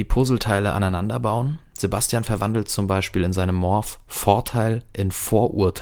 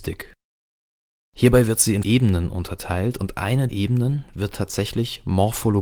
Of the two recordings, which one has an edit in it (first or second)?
second